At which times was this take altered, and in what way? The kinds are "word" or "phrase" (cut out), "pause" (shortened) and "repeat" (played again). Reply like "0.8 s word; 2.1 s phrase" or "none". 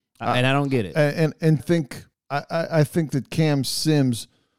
1.6 s phrase

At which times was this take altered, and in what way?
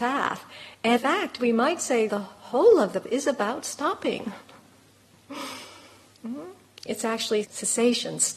1.0 s word; 2.1 s word; 3.0 s word; 7.4 s word

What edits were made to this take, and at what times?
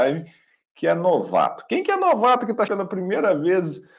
2.7 s word

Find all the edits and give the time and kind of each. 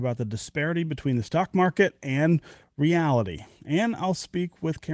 none

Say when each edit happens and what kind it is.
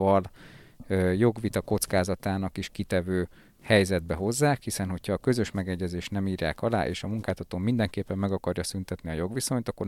none

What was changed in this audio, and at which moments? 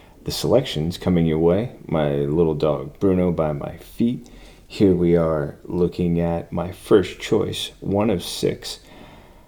none

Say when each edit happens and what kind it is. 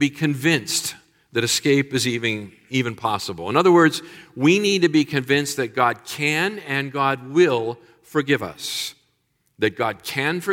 none

